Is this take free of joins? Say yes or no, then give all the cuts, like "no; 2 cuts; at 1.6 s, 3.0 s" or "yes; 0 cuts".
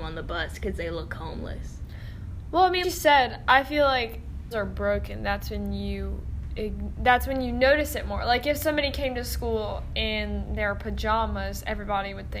no; 2 cuts; at 2.8 s, 4.5 s